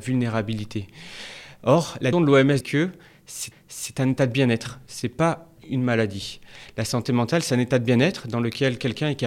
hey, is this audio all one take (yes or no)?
no